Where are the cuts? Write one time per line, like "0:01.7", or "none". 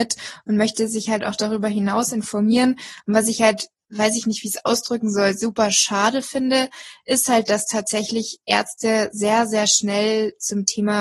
none